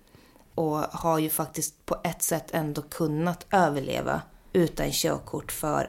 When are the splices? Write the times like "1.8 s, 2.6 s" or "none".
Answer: none